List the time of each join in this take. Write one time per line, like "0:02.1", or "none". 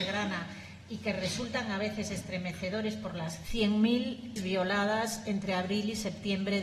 0:03.4
0:04.4